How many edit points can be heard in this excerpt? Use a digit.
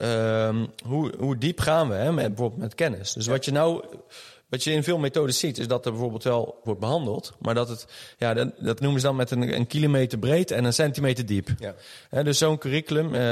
2